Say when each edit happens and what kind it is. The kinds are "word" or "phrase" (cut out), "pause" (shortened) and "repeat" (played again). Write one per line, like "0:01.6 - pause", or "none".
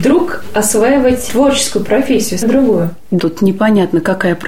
0:01.3 - word
0:02.4 - word
0:03.2 - word